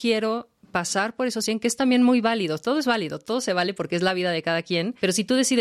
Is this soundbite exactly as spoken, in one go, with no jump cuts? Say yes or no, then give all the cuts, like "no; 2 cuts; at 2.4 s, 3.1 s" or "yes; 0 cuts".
yes; 0 cuts